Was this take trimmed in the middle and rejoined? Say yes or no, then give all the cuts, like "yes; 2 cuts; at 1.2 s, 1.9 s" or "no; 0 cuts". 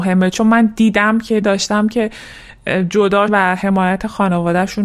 yes; 2 cuts; at 1.4 s, 3.3 s